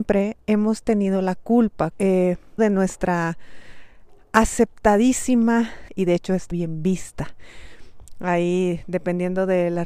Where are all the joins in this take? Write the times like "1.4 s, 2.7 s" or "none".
1.9 s, 2.6 s, 5.9 s, 6.5 s